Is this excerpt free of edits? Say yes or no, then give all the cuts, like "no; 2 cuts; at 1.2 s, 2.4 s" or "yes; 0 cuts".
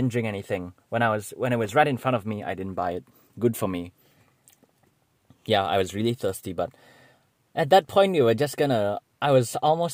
yes; 0 cuts